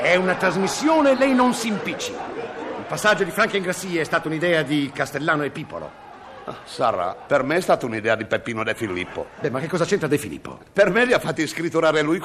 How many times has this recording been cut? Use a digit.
0